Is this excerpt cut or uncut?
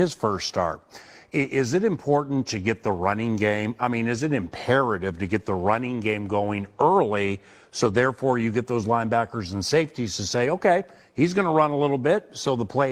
uncut